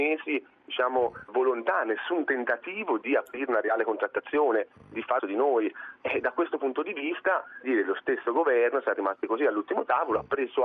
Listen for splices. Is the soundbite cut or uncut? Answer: cut